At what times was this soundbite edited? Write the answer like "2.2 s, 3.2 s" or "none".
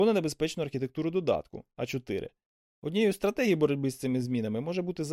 none